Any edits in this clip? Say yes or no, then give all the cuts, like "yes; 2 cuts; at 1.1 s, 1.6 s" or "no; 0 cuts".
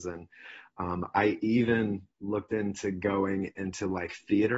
yes; 1 cut; at 2.1 s